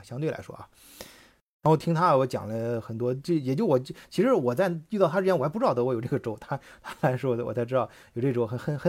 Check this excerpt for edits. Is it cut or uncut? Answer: uncut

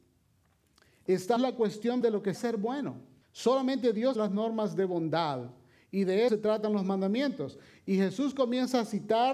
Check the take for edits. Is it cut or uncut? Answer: cut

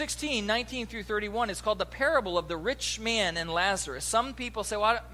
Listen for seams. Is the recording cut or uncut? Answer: uncut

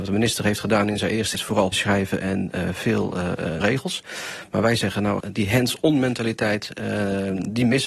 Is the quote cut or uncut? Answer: cut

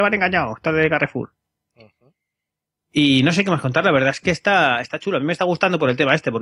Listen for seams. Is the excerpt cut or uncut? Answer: uncut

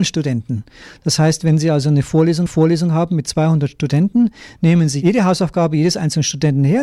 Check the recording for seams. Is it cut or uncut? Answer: cut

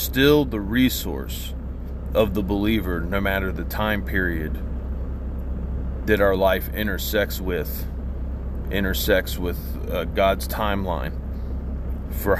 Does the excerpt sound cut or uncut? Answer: uncut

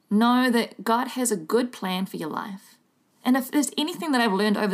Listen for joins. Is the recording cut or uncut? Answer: cut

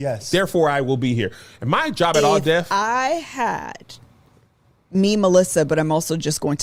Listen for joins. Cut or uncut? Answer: uncut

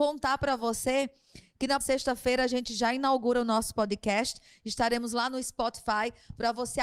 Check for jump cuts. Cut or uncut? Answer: cut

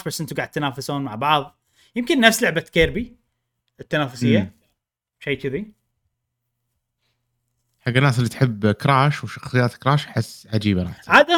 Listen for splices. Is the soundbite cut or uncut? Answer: uncut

